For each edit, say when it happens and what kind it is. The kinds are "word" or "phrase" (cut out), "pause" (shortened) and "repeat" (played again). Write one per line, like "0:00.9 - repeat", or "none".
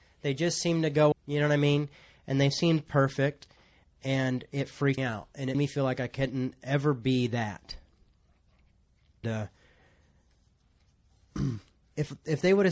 0:01.1 - word
0:05.0 - word
0:05.5 - word
0:09.2 - word

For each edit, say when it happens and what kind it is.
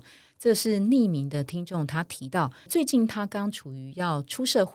0:02.7 - word

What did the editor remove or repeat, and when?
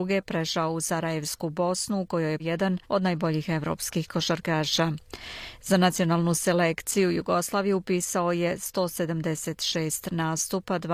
0:02.4 - word
0:02.8 - pause

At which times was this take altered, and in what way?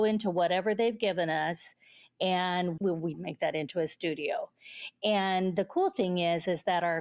0:02.8 - word

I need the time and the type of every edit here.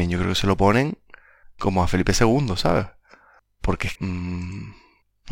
0:01.6 - word
0:03.9 - word

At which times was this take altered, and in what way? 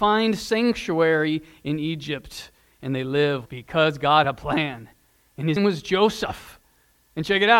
0:03.5 - word
0:04.2 - word
0:05.6 - word

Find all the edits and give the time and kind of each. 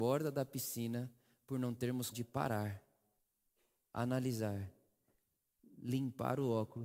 0:02.1 - word

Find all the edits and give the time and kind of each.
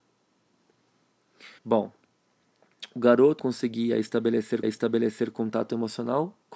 0:01.6 - pause
0:03.4 - word
0:04.6 - repeat

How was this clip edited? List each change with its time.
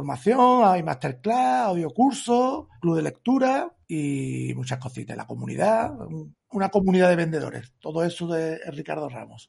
0:02.8 - word
0:03.8 - pause
0:06.5 - word

